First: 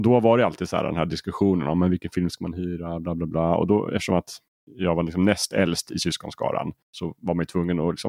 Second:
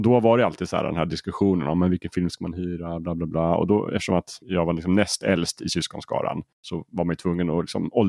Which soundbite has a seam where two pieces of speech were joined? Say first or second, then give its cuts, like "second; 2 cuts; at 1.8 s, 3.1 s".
second; 1 cut; at 4.4 s